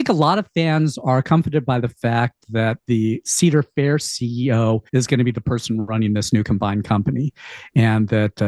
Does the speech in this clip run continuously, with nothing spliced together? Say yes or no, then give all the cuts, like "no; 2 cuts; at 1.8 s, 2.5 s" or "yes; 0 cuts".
no; 1 cut; at 4.9 s